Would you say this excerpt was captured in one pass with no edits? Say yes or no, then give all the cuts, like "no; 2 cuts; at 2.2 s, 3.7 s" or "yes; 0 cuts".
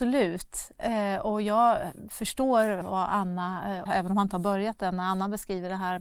no; 2 cuts; at 2.8 s, 3.9 s